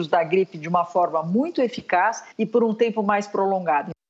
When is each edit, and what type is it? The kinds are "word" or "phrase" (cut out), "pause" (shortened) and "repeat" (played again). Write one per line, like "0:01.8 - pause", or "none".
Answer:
0:02.3 - pause